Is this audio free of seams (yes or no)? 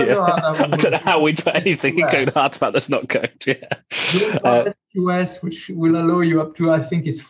yes